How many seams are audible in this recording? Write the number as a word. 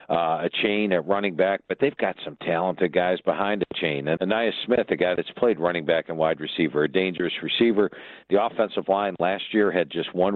one